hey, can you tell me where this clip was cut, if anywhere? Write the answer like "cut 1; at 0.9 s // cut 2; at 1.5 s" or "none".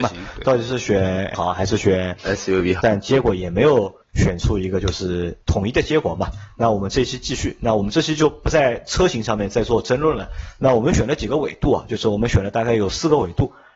cut 1; at 1.3 s // cut 2; at 2.8 s // cut 3; at 4.0 s // cut 4; at 5.4 s

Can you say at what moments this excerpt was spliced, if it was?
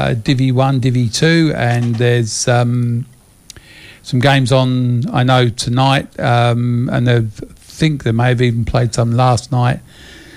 none

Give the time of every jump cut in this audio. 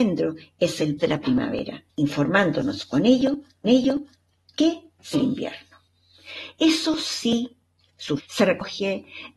cut 1; at 1.0 s // cut 2; at 1.9 s // cut 3; at 3.6 s // cut 4; at 5.1 s // cut 5; at 8.2 s

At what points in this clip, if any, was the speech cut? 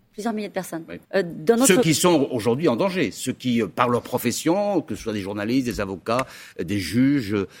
cut 1; at 1.0 s

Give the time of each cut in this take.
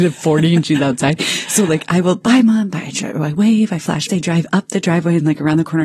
cut 1; at 4.1 s

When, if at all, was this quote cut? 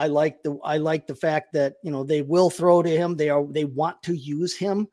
none

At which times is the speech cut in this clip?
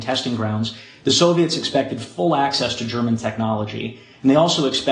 none

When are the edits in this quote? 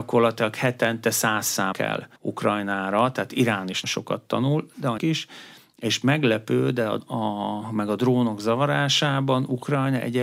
cut 1; at 1.7 s // cut 2; at 2.2 s // cut 3; at 3.8 s // cut 4; at 5.0 s // cut 5; at 7.0 s

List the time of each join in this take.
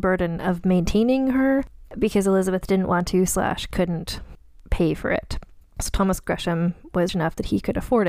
cut 1; at 7.1 s

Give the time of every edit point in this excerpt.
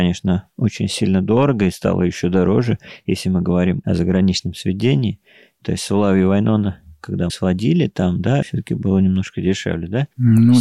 cut 1; at 7.3 s // cut 2; at 8.4 s

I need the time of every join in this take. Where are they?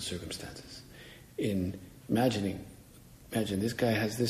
none

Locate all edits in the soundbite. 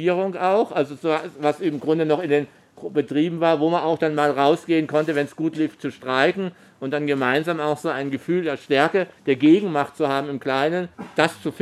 none

